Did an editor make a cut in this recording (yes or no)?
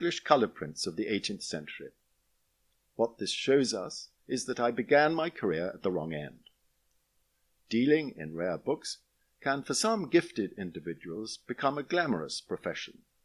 yes